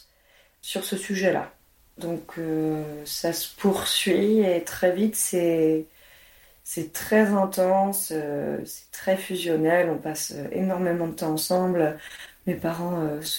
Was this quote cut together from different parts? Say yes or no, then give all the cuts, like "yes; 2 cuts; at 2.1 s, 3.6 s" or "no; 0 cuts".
no; 0 cuts